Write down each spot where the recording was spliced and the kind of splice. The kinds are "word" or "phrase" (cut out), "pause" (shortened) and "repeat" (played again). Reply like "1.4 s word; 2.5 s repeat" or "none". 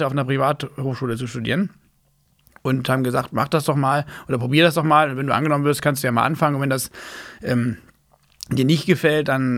none